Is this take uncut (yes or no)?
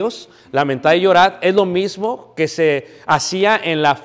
yes